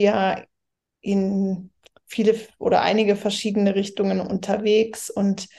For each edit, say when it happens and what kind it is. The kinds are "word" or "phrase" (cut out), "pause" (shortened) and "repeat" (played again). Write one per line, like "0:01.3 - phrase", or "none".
none